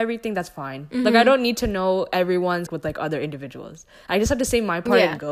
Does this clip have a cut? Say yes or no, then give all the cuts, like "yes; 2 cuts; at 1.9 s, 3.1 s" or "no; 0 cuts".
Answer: yes; 1 cut; at 2.7 s